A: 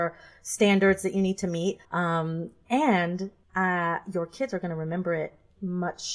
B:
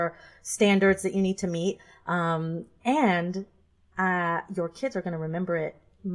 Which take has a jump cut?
A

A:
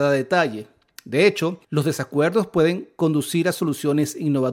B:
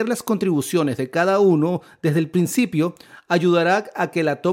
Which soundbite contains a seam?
A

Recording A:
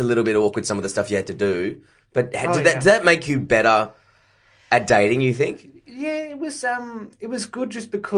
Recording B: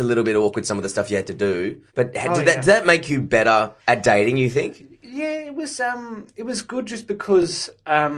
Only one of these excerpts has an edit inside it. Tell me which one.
B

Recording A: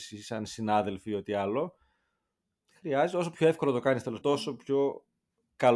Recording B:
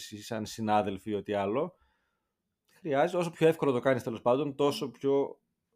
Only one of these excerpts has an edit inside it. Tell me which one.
A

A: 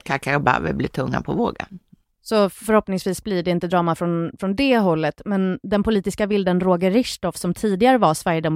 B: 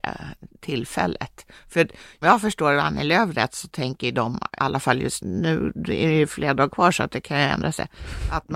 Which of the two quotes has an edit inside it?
B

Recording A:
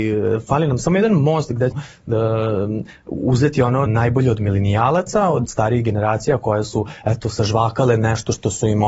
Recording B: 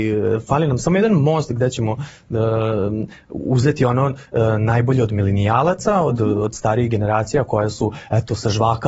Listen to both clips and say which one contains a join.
A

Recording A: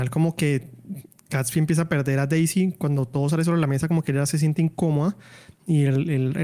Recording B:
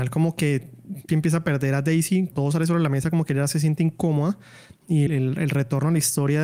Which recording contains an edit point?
B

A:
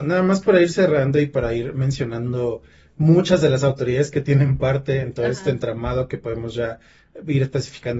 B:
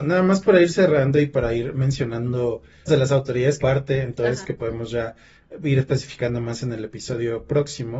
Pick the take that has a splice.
B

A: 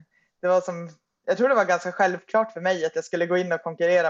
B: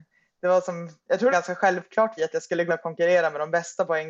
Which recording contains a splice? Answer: B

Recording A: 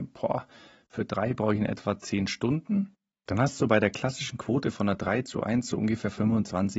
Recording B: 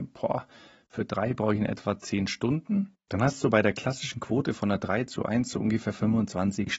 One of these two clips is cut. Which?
B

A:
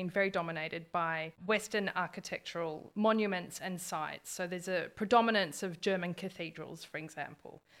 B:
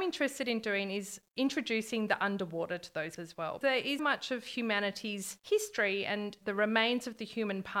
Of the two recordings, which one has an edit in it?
B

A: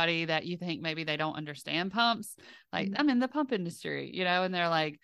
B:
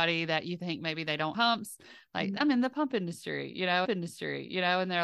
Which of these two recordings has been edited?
B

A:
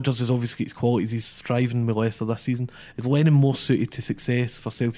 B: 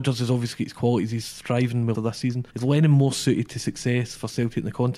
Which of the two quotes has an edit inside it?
B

